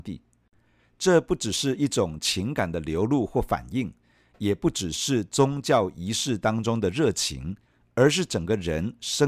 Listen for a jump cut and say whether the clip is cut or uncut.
uncut